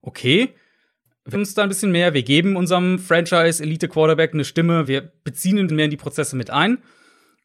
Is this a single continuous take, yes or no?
no